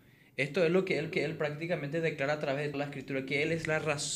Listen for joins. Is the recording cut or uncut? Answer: cut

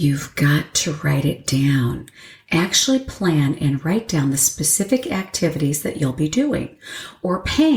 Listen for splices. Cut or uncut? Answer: uncut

